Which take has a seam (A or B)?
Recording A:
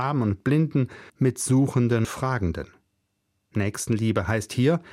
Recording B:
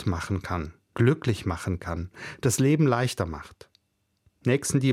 A